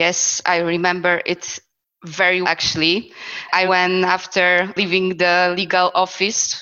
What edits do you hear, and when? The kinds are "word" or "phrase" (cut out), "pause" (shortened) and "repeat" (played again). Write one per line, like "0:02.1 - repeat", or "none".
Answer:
0:02.4 - word
0:03.7 - word